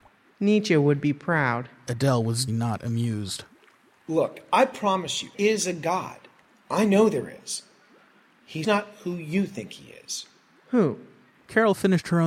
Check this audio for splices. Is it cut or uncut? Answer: cut